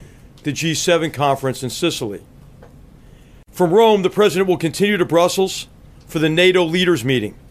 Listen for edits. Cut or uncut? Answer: uncut